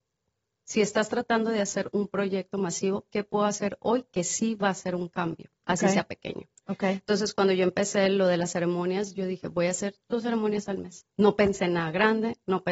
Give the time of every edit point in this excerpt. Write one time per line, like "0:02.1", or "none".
0:05.6
0:10.0